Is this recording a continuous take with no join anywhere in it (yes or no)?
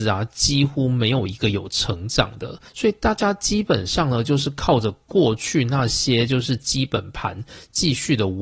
no